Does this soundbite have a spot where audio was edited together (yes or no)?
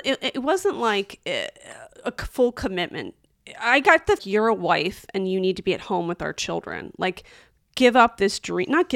yes